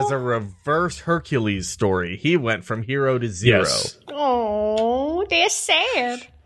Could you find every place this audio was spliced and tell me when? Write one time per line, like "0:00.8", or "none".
none